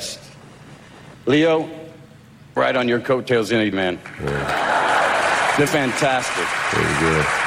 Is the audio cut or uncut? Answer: cut